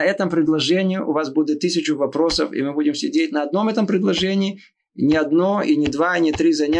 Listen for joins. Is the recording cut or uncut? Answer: uncut